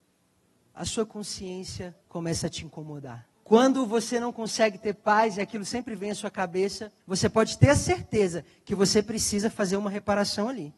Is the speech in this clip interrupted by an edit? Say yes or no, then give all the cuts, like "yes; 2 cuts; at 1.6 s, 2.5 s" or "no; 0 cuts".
yes; 3 cuts; at 2.0 s, 3.3 s, 7.0 s